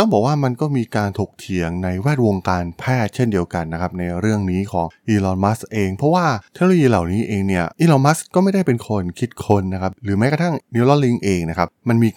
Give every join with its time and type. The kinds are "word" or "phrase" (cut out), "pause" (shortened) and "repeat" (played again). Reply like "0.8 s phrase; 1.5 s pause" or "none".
7.7 s pause

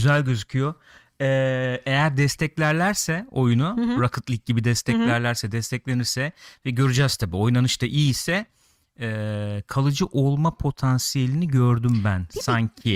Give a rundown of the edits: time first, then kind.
none

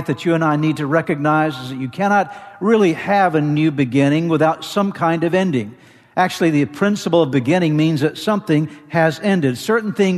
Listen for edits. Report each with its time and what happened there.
none

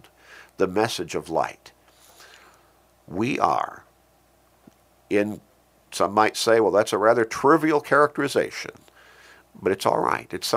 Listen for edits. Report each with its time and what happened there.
none

